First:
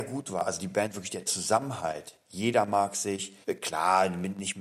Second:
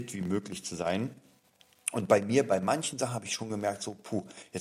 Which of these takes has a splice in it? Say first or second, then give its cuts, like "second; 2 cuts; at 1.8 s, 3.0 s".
first; 1 cut; at 3.4 s